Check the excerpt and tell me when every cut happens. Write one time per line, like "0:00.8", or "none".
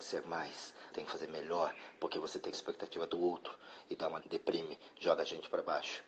0:00.9
0:02.5
0:04.2